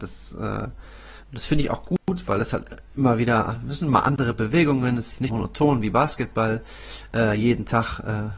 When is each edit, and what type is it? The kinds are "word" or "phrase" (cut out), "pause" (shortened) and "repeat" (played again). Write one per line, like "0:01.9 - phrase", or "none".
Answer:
0:05.3 - word